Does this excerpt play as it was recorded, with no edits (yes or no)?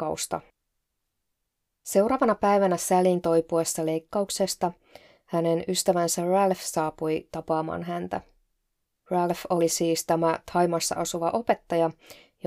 yes